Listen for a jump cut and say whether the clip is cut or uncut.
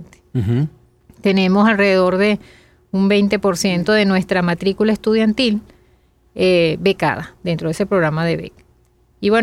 uncut